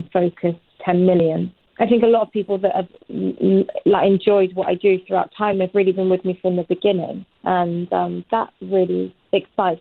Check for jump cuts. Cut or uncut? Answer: uncut